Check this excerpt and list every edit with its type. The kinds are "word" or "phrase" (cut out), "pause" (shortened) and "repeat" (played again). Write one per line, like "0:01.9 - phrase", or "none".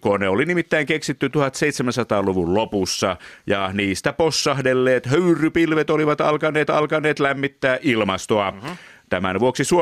0:06.7 - repeat